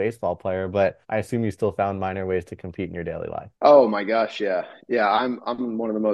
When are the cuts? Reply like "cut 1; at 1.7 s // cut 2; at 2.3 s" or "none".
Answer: cut 1; at 1.0 s // cut 2; at 3.6 s